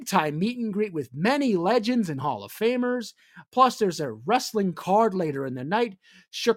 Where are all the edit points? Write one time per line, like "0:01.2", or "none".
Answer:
none